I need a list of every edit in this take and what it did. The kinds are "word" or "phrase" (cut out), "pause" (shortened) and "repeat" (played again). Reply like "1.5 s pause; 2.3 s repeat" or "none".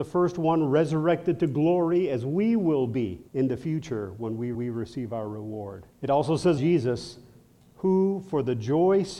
3.3 s pause; 4.5 s repeat; 5.9 s pause; 6.6 s word